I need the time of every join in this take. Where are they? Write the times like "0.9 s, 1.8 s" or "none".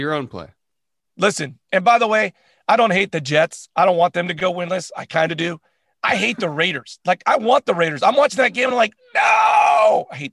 none

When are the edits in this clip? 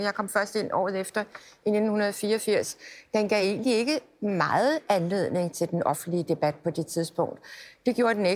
none

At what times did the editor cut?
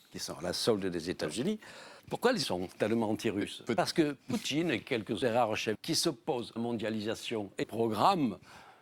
2.0 s, 2.4 s, 4.2 s, 5.2 s, 5.7 s, 6.6 s, 7.6 s

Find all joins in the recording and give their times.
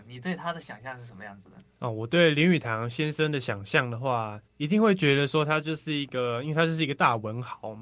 1.7 s, 4.4 s

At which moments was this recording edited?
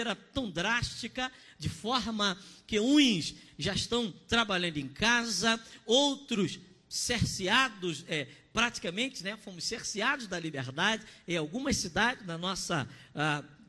none

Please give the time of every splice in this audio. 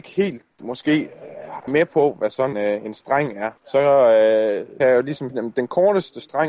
1.7 s, 2.5 s, 3.6 s, 4.8 s, 5.3 s

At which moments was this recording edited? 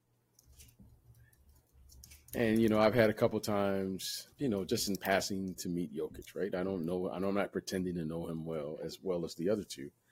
4.3 s

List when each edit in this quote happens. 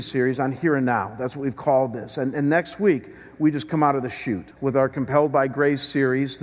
4.5 s

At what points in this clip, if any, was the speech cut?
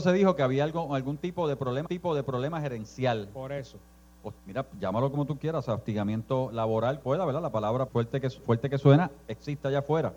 1.8 s, 4.4 s, 7.0 s, 7.9 s, 8.4 s

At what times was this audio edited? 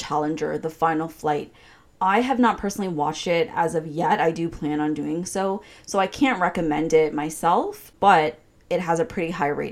none

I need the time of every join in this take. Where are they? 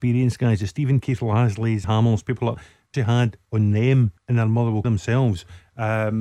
1.0 s, 1.8 s, 2.5 s, 2.9 s, 4.2 s, 4.8 s

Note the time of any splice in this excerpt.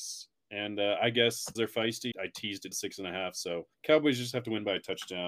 1.6 s, 2.1 s, 2.7 s, 3.7 s

